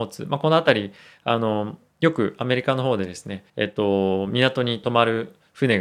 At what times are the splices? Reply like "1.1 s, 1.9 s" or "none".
3.5 s